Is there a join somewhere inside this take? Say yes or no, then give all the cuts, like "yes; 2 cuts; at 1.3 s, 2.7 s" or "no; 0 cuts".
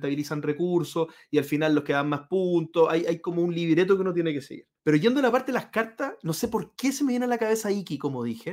yes; 1 cut; at 4.8 s